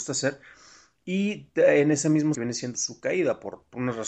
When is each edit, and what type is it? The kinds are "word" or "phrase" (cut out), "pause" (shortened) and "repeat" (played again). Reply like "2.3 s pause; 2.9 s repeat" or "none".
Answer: 2.3 s phrase; 2.7 s word